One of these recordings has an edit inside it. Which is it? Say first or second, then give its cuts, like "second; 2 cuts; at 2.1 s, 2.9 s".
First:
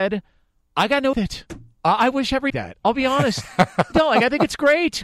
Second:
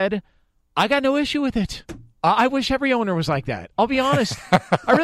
first; 3 cuts; at 1.1 s, 2.5 s, 3.9 s